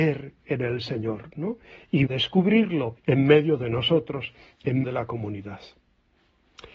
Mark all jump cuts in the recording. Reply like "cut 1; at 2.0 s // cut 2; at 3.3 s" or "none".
cut 1; at 2.1 s // cut 2; at 3.0 s // cut 3; at 4.8 s